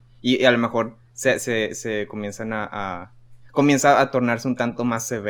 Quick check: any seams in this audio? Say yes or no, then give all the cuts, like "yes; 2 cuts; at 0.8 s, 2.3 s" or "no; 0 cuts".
no; 0 cuts